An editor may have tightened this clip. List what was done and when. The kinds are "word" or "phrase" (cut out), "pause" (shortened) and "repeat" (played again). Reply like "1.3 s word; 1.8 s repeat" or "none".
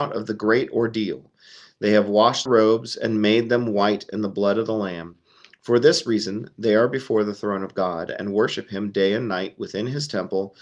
2.5 s word